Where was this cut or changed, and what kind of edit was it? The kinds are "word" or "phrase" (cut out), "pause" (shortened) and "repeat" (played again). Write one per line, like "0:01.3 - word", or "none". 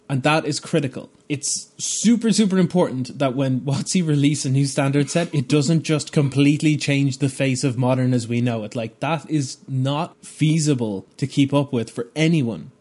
0:01.2 - pause
0:11.1 - pause